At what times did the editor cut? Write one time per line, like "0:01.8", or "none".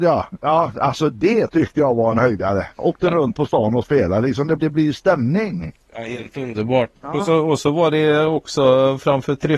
0:04.6
0:07.0